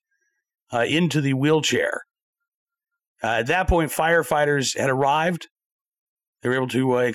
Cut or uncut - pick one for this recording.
uncut